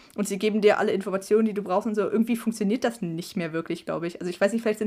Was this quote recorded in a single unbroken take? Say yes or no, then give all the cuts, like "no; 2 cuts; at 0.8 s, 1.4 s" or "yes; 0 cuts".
yes; 0 cuts